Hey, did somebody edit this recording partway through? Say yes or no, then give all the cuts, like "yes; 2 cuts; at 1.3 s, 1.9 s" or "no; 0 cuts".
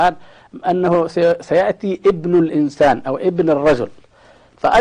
no; 0 cuts